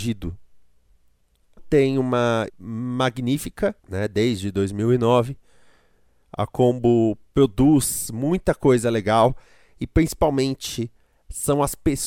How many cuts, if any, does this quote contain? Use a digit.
3